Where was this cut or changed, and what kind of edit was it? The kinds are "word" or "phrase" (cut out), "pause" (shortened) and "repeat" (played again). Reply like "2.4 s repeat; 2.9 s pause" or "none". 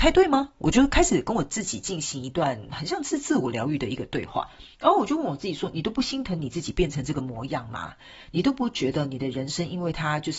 4.7 s pause